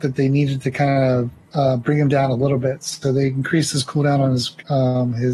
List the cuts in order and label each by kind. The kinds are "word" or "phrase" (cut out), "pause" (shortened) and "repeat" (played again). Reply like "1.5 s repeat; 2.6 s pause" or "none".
none